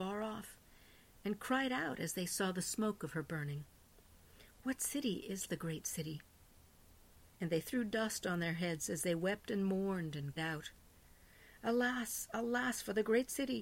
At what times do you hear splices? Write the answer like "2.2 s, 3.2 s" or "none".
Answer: 5.4 s, 10.4 s